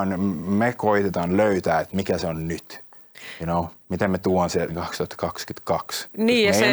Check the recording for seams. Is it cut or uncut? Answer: cut